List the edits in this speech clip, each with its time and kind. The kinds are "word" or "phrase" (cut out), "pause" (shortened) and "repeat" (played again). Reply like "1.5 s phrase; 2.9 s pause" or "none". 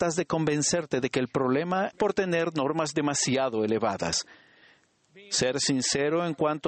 1.9 s phrase